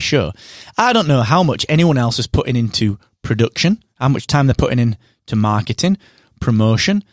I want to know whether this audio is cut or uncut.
uncut